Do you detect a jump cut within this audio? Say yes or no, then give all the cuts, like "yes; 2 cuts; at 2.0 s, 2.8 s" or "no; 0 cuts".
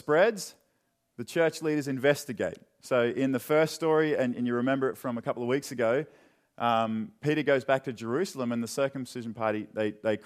no; 0 cuts